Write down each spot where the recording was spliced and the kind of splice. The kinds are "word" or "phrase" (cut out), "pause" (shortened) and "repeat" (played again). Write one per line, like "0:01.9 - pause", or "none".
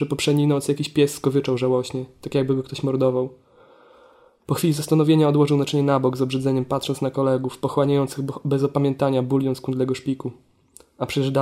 none